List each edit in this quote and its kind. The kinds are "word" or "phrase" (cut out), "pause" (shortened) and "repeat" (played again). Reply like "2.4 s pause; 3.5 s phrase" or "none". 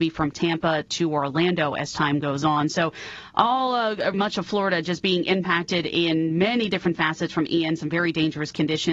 4.1 s word